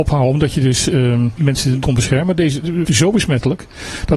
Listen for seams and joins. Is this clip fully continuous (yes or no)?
no